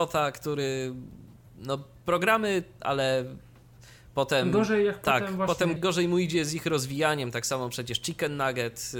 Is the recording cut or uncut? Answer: cut